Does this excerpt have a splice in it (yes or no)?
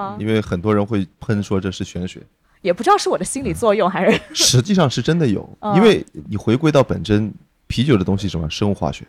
no